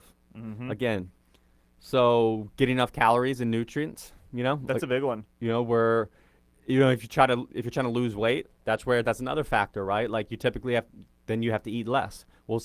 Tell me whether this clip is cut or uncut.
uncut